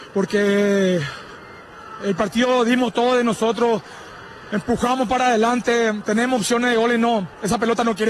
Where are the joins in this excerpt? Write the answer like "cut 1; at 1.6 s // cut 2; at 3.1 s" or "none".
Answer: none